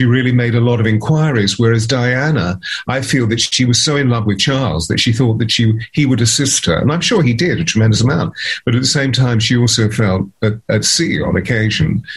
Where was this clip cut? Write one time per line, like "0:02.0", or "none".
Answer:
none